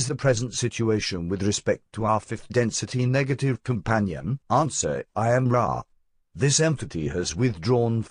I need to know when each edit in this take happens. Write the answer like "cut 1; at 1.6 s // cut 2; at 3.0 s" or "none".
cut 1; at 4.4 s